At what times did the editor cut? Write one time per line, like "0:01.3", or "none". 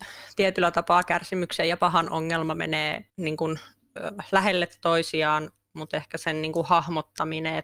0:03.1